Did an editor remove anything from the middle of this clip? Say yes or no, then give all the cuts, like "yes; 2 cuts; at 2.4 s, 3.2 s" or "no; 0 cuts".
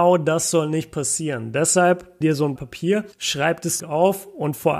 yes; 4 cuts; at 2.2 s, 2.6 s, 3.1 s, 3.8 s